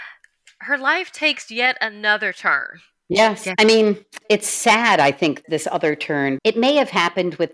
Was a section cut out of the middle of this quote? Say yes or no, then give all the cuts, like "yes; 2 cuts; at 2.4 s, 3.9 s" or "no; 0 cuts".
yes; 3 cuts; at 4.2 s, 5.4 s, 6.4 s